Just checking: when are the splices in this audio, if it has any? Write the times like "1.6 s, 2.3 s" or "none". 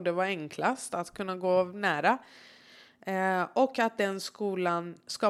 none

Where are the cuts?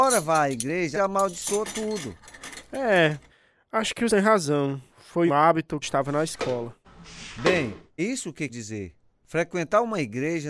0.9 s, 3.3 s, 4.1 s, 5.3 s, 5.8 s, 8.0 s, 8.5 s

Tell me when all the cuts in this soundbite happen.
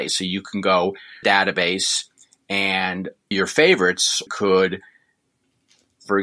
1.2 s, 3.3 s, 4.3 s

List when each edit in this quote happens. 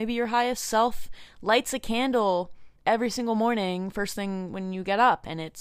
2.8 s

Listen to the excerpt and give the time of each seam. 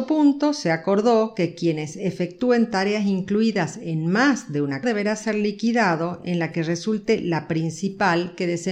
4.8 s

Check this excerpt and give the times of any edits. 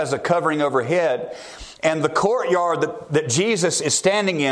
none

